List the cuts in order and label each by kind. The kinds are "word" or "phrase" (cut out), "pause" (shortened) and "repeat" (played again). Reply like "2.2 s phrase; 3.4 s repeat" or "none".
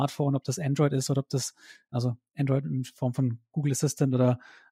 none